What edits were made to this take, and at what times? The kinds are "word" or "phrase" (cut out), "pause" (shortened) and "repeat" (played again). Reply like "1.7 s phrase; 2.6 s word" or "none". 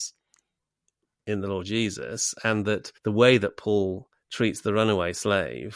3.0 s pause